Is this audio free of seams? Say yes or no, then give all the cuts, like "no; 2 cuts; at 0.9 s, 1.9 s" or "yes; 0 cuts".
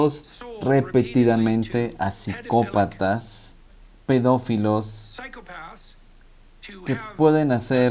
no; 1 cut; at 3.7 s